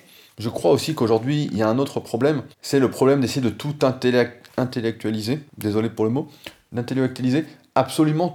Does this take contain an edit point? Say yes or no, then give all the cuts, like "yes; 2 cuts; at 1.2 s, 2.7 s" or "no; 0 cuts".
yes; 2 cuts; at 2.5 s, 5.5 s